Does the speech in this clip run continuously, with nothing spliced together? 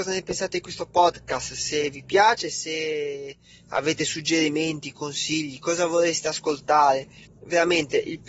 yes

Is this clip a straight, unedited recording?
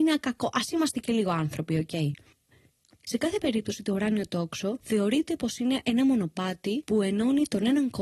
yes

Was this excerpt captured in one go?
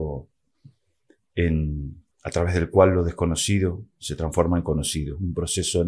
no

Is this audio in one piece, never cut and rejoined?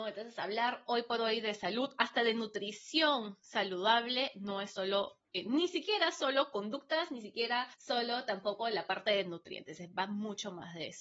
no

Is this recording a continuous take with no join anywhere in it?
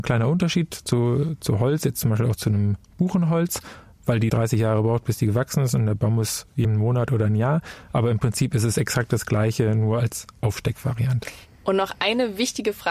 no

